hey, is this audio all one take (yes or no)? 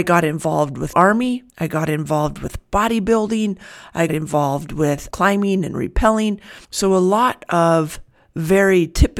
no